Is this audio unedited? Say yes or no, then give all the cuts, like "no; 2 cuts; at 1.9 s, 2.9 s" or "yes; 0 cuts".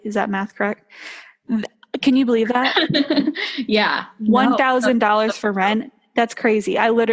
yes; 0 cuts